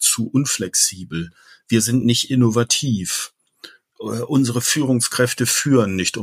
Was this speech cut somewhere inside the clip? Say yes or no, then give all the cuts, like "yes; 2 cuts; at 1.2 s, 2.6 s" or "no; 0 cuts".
no; 0 cuts